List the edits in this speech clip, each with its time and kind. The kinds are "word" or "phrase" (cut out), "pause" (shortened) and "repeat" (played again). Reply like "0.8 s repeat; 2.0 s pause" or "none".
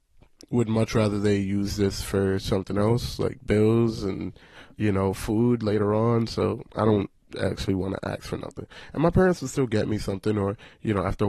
none